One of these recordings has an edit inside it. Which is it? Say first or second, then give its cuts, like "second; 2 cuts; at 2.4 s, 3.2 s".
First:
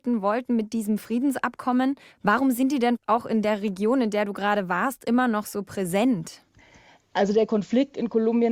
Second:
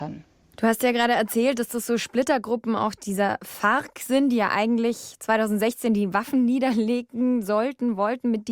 first; 1 cut; at 2.1 s